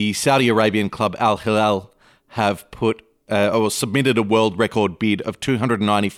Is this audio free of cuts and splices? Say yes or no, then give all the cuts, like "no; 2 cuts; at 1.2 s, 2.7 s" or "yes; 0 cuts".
yes; 0 cuts